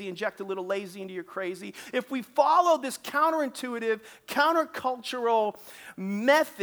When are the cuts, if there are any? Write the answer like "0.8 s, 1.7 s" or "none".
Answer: none